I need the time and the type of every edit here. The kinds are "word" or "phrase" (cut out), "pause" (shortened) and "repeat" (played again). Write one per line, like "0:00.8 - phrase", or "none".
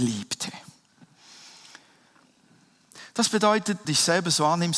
0:03.8 - phrase